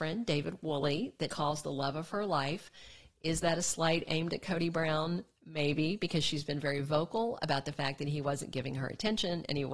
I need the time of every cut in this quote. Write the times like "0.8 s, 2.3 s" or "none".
1.3 s